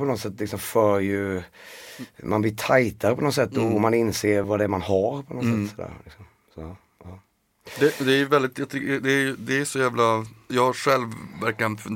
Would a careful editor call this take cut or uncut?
cut